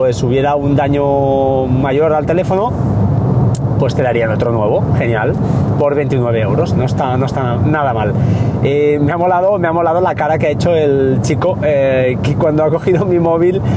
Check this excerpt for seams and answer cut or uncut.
uncut